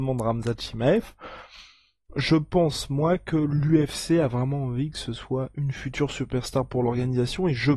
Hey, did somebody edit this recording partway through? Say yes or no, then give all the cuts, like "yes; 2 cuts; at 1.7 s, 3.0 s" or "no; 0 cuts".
no; 0 cuts